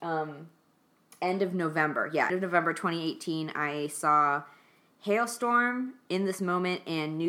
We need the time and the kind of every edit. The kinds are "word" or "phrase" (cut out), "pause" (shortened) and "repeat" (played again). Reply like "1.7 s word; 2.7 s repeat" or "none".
2.3 s word